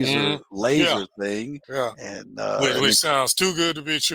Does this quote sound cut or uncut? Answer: cut